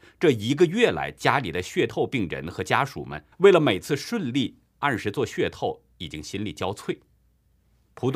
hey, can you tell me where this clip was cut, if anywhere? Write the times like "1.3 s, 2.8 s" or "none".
3.3 s